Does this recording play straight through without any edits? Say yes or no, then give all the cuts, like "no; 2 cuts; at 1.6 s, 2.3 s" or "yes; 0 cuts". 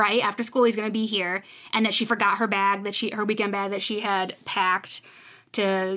yes; 0 cuts